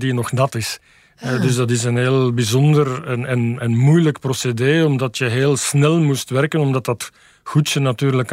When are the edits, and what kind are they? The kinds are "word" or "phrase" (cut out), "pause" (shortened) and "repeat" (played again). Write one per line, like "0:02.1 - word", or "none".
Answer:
none